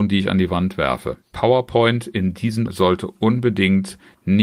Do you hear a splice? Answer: yes; 2 cuts; at 1.2 s, 2.7 s

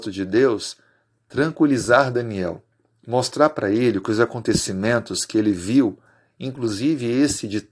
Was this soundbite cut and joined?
no; 0 cuts

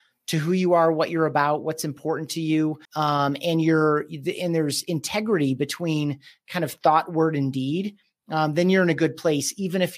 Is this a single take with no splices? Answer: no; 1 cut; at 2.8 s

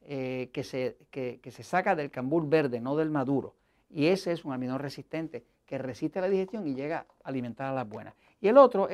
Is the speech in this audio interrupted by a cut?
no; 0 cuts

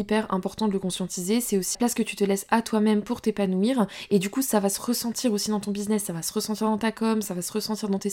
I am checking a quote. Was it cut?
yes; 1 cut; at 1.7 s

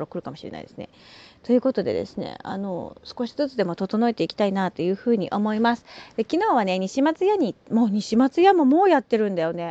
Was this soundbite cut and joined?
no; 0 cuts

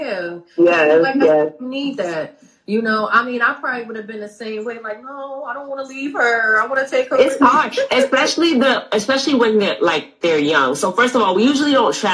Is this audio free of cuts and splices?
yes; 0 cuts

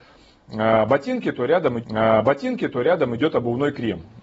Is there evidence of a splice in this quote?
yes; 1 cut; at 1.8 s

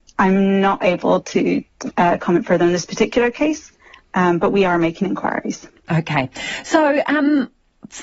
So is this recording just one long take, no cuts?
yes; 0 cuts

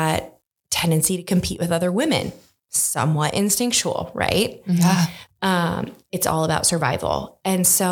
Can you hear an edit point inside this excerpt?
no; 0 cuts

